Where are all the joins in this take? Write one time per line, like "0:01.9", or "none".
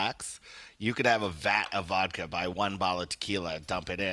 none